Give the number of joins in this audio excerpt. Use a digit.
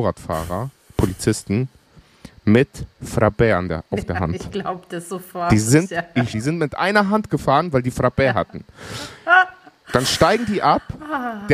1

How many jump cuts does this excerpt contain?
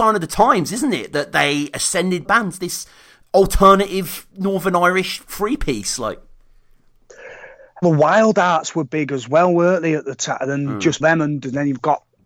4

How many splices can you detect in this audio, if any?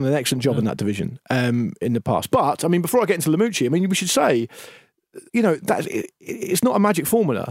1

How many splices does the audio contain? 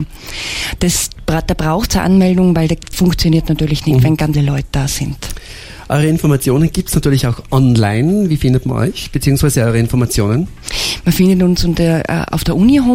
2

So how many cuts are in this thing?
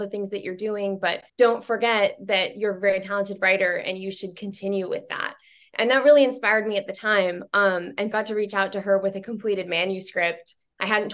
2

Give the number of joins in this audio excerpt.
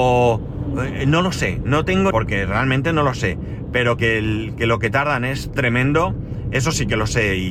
2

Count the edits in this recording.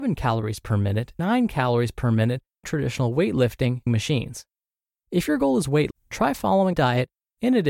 5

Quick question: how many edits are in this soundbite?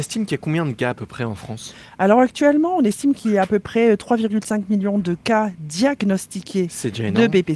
0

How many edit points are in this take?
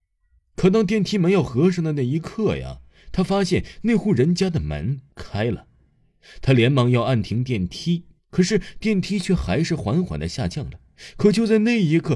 2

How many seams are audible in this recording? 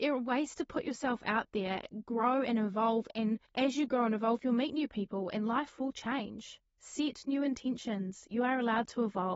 2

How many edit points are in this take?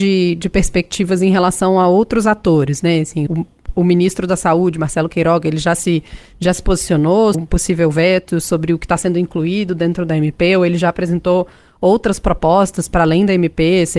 2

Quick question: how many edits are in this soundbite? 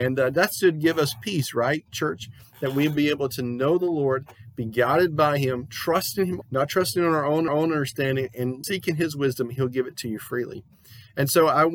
3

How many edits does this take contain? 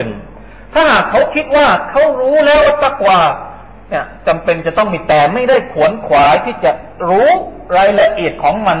0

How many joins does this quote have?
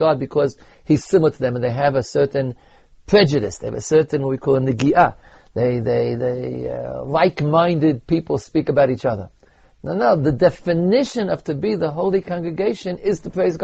0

